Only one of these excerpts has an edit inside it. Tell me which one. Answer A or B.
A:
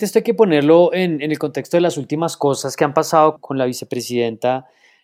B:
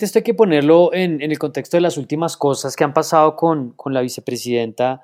A